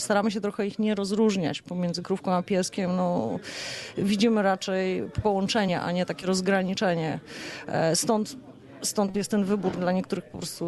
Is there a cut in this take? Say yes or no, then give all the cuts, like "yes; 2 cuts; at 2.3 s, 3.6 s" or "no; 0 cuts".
no; 0 cuts